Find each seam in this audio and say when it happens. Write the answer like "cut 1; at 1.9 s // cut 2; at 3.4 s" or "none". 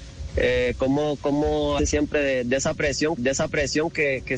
cut 1; at 1.8 s // cut 2; at 3.2 s